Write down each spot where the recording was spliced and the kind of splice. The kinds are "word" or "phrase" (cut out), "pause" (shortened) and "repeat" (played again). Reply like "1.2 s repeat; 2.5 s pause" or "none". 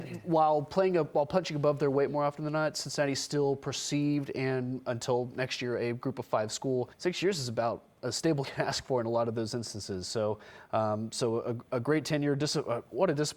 6.9 s pause; 8.4 s phrase